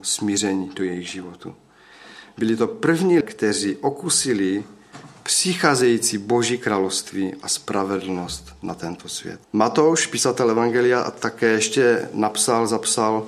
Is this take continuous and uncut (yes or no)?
no